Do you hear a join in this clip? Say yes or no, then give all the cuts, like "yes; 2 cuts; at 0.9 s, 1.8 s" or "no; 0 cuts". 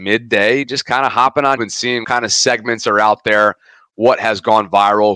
yes; 2 cuts; at 1.6 s, 2.0 s